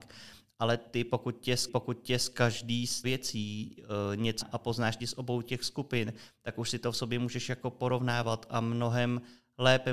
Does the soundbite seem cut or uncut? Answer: cut